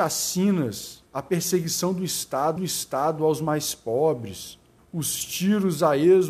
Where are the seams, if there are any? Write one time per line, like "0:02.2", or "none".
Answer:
0:01.1
0:02.6
0:04.8